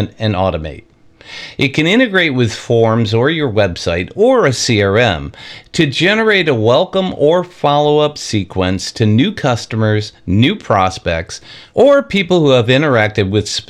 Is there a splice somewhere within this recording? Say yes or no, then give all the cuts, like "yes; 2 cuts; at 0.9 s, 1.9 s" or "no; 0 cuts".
no; 0 cuts